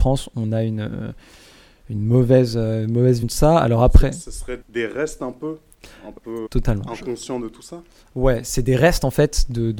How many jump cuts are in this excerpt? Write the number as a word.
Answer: three